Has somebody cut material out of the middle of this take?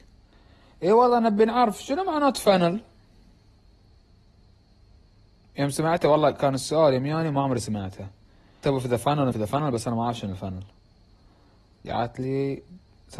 yes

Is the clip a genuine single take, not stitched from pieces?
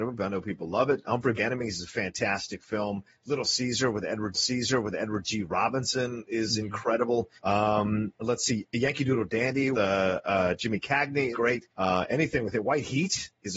no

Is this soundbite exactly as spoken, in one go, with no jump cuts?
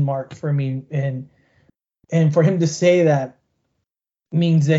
yes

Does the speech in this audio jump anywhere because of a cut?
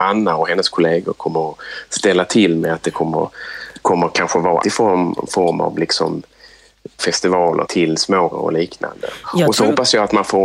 yes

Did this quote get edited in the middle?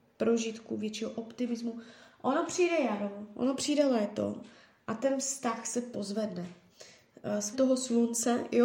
yes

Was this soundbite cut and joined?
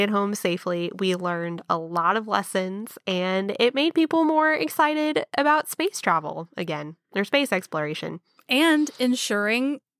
no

